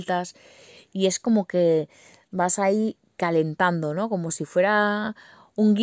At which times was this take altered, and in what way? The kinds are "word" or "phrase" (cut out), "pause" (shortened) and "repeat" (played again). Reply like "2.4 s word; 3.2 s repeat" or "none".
none